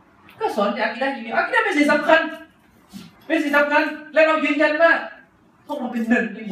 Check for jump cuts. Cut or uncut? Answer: cut